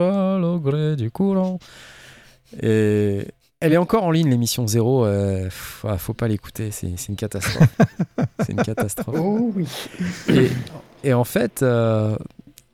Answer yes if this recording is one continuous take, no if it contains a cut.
yes